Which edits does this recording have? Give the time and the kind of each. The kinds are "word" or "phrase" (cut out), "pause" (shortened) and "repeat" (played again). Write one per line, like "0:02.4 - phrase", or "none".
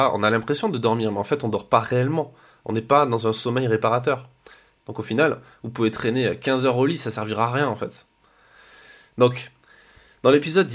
none